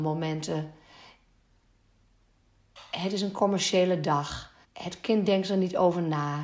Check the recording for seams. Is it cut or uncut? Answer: cut